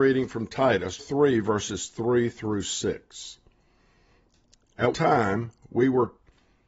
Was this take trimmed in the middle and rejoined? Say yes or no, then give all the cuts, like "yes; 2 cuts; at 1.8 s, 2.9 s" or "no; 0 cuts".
yes; 2 cuts; at 1.0 s, 4.9 s